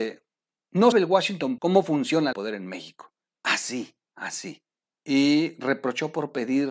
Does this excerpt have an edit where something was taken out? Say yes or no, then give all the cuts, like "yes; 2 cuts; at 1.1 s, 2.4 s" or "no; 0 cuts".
yes; 5 cuts; at 0.9 s, 1.6 s, 2.3 s, 3.3 s, 4.8 s